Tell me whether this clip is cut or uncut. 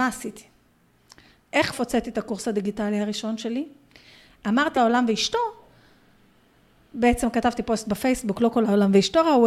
cut